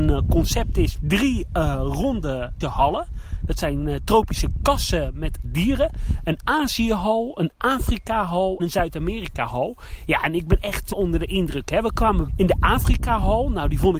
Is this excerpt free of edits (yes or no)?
no